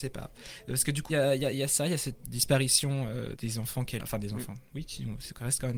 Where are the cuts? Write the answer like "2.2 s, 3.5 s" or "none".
1.1 s, 2.2 s, 3.3 s, 4.0 s